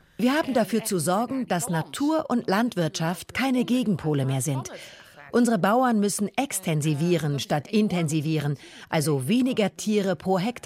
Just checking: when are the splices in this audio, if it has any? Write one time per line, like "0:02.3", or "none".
none